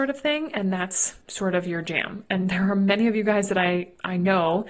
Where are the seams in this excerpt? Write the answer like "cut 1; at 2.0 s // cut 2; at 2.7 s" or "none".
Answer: cut 1; at 1.2 s

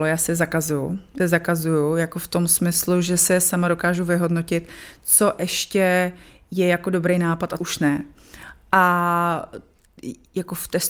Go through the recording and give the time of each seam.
cut 1; at 1.2 s // cut 2; at 7.6 s

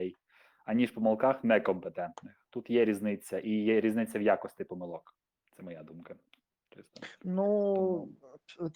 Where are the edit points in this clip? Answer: cut 1; at 5.3 s

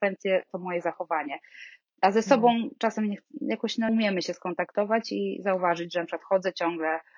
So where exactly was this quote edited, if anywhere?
cut 1; at 3.9 s

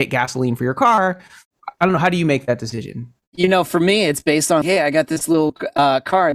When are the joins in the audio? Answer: cut 1; at 1.8 s // cut 2; at 4.6 s

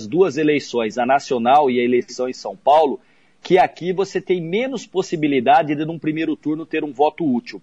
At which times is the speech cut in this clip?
none

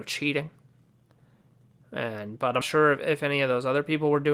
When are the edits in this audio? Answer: cut 1; at 2.6 s

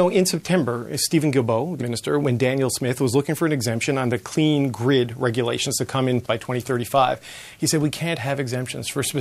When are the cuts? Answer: cut 1; at 1.8 s // cut 2; at 2.2 s // cut 3; at 6.2 s

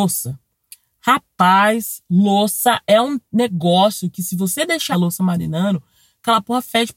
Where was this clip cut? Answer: cut 1; at 4.9 s

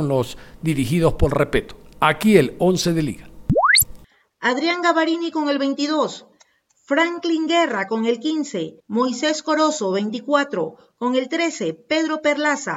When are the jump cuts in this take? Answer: cut 1; at 8.8 s

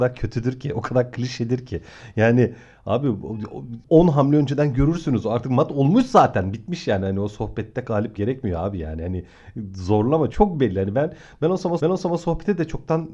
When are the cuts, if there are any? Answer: cut 1; at 3.9 s // cut 2; at 8.2 s // cut 3; at 10.3 s // cut 4; at 11.8 s

